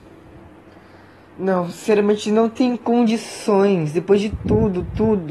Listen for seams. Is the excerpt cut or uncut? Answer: uncut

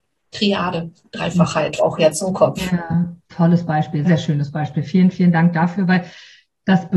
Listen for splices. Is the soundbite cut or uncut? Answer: cut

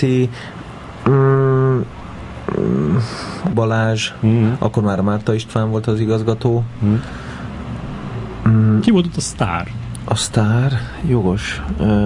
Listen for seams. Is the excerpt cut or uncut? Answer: cut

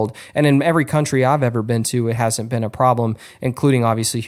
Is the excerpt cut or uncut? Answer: uncut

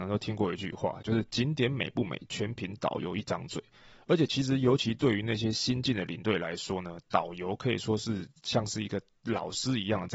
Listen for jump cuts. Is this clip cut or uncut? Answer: uncut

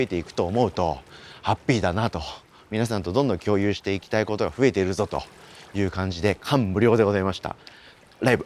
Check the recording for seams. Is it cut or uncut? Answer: uncut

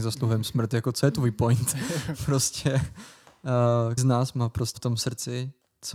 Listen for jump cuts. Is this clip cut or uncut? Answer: cut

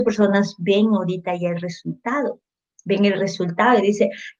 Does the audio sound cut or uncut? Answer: uncut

